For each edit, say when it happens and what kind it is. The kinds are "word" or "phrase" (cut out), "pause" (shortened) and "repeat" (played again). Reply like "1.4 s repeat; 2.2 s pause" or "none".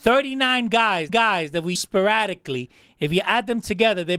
1.1 s repeat; 1.7 s word